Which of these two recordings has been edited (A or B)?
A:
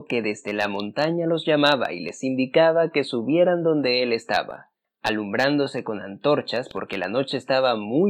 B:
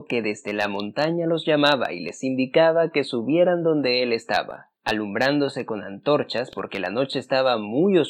B